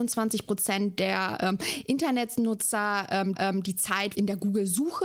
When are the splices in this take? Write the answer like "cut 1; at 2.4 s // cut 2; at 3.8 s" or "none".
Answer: cut 1; at 3.3 s // cut 2; at 4.1 s